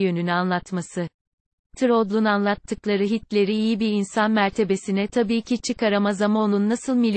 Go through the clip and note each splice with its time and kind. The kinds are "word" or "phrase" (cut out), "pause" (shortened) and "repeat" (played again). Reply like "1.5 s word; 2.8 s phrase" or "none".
none

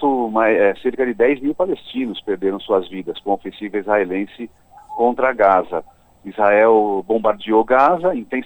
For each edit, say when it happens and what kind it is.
none

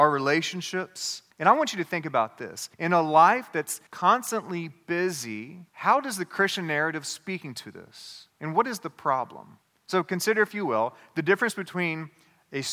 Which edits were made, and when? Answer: 1.3 s pause; 2.7 s pause; 3.9 s pause; 5.7 s pause; 8.3 s pause; 9.6 s pause

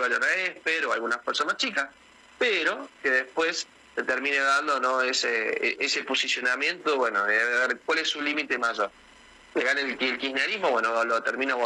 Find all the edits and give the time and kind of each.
none

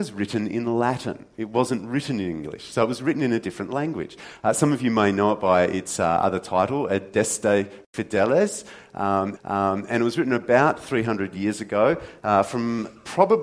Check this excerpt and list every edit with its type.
9.4 s repeat

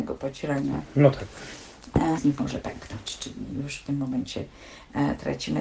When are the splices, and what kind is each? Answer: 2.2 s word

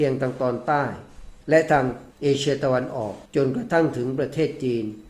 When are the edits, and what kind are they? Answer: 1.4 s pause; 2.1 s pause; 3.2 s pause

